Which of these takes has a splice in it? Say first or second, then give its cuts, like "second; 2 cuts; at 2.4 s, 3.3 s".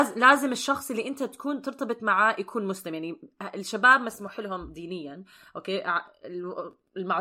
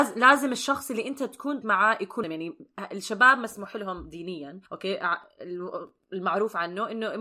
second; 3 cuts; at 1.6 s, 2.2 s, 4.7 s